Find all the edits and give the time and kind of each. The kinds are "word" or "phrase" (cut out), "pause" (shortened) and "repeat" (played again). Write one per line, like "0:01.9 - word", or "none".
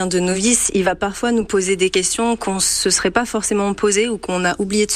none